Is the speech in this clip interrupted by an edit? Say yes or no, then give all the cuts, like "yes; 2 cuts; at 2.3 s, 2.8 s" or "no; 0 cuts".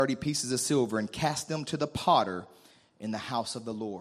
no; 0 cuts